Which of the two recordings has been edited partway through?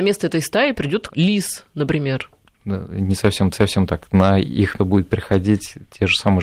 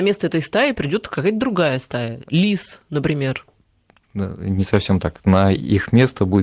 first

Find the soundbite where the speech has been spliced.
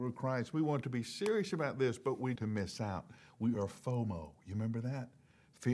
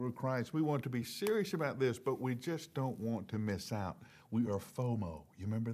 first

